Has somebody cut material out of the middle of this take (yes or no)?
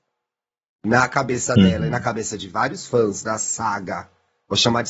no